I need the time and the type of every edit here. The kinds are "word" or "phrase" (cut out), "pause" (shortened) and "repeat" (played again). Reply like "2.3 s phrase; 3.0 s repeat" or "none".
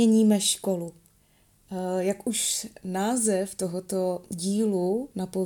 none